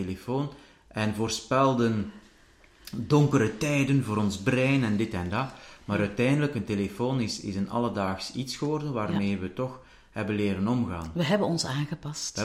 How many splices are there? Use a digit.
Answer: 0